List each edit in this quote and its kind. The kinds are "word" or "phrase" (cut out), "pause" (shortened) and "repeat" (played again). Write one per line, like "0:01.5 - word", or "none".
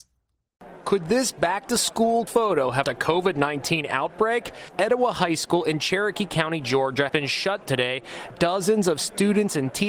0:02.3 - word
0:02.8 - word
0:07.1 - word
0:07.7 - word
0:08.3 - word